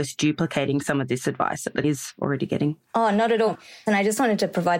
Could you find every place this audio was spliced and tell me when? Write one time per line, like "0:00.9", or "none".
0:01.8

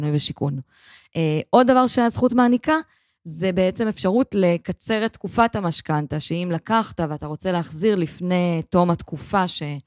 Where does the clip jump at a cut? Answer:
none

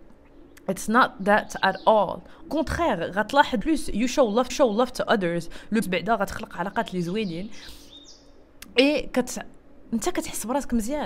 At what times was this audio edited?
0:02.5
0:03.6
0:04.5
0:05.8

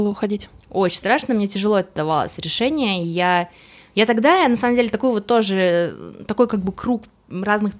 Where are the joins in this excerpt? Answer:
none

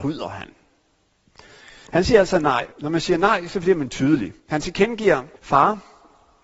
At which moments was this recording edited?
0:02.7
0:04.4
0:05.4

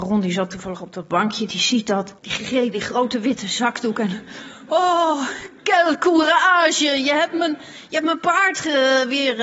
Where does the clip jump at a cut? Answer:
0:02.2
0:02.7

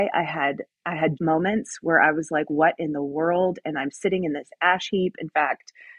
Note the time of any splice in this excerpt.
0:01.2

